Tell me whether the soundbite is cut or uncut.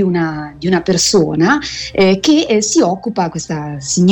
uncut